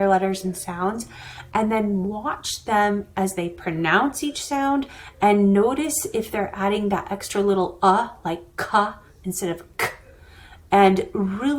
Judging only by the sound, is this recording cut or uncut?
uncut